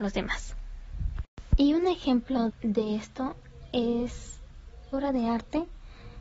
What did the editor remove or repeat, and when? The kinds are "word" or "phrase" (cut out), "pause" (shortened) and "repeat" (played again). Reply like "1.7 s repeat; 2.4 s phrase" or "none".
2.5 s word; 4.9 s word

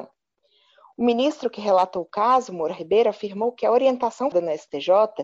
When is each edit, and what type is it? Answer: 4.3 s word

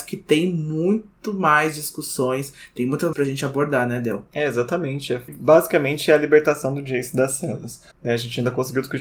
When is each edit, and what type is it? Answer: 3.1 s phrase; 5.3 s word; 7.9 s pause

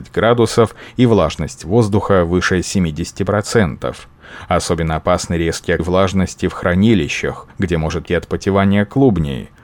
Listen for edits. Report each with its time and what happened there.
5.8 s phrase; 7.5 s pause; 8.1 s word

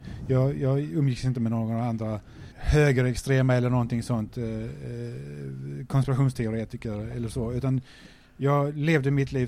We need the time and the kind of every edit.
2.5 s pause

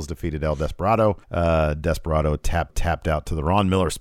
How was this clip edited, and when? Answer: 1.2 s pause; 2.7 s repeat

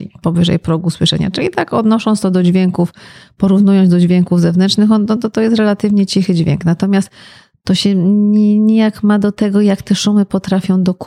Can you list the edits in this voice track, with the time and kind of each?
none

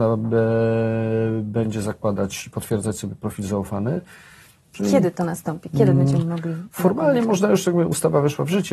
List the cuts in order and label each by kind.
none

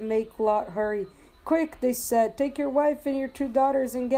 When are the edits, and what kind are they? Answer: none

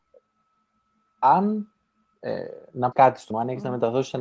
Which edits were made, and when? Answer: 2.1 s word; 2.9 s word; 3.3 s word

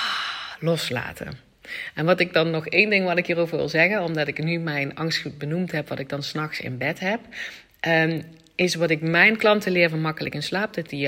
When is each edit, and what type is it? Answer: none

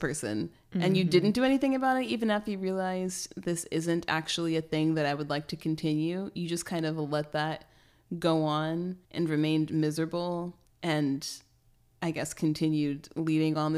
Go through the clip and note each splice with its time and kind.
9.0 s pause; 10.7 s pause

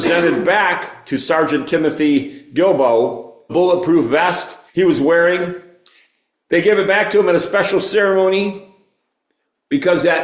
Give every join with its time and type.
3.5 s word; 4.7 s pause

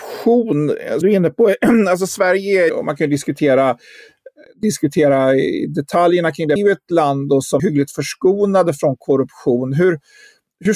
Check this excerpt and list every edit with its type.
1.0 s word; 2.7 s word; 4.4 s pause; 6.6 s phrase; 7.6 s word

